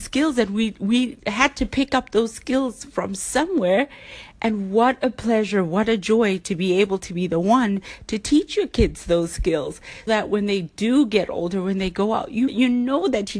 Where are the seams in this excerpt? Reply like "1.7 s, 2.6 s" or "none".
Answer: 10.1 s, 12.5 s